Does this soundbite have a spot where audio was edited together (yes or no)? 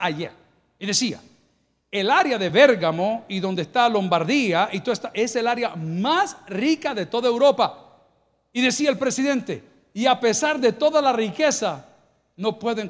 no